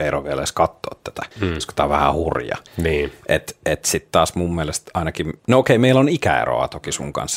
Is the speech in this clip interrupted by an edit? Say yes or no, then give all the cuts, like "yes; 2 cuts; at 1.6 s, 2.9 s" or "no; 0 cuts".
yes; 3 cuts; at 1.3 s, 2.7 s, 5.4 s